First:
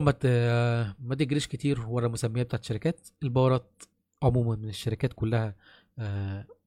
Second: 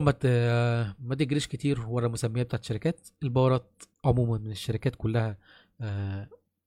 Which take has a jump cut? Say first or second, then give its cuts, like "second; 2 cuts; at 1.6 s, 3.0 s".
second; 1 cut; at 3.9 s